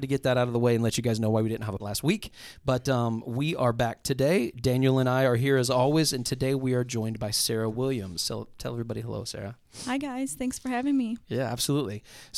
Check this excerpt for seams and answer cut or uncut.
cut